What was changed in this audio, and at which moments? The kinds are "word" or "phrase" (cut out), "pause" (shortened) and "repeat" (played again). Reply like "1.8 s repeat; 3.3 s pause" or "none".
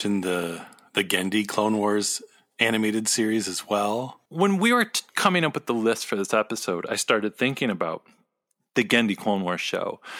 4.3 s pause; 5.1 s pause